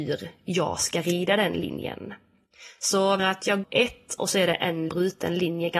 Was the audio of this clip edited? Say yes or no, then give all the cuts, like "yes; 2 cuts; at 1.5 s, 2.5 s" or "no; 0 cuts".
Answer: yes; 3 cuts; at 3.2 s, 3.6 s, 4.9 s